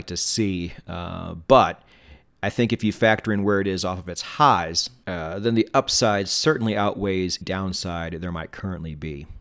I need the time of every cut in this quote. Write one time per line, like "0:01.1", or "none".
0:07.4